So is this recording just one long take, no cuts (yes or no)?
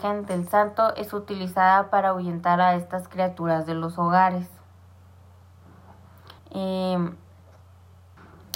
no